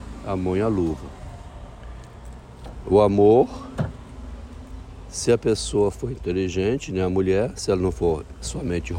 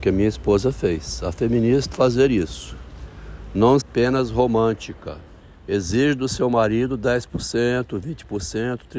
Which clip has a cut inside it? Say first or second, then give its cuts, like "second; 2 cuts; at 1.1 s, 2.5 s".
second; 3 cuts; at 1.9 s, 3.8 s, 5.4 s